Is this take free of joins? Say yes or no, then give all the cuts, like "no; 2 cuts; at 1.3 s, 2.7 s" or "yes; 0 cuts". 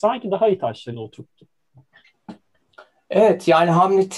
no; 1 cut; at 0.9 s